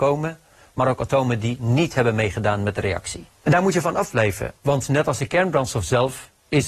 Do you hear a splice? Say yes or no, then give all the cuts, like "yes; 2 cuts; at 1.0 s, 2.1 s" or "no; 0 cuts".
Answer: yes; 1 cut; at 4.6 s